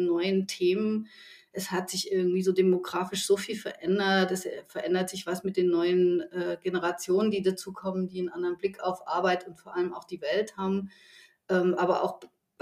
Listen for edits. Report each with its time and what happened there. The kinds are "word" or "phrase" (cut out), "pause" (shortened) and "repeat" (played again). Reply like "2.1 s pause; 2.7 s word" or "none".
none

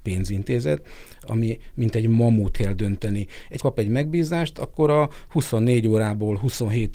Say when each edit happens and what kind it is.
2.5 s phrase; 3.6 s word

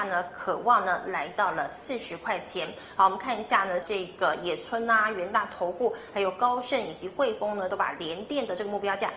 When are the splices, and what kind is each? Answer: 3.8 s phrase

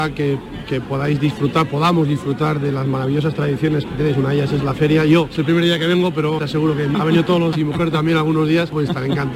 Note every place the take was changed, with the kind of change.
6.4 s word; 6.9 s word; 7.5 s word

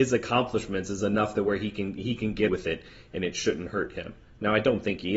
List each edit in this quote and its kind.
2.5 s word

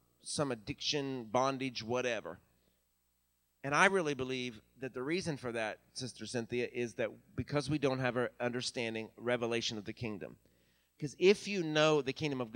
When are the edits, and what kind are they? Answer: none

